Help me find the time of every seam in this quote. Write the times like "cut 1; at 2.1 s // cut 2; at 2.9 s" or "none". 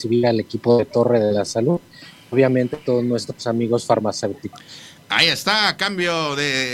none